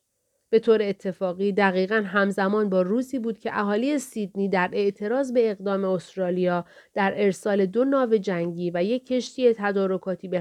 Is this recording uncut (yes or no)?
yes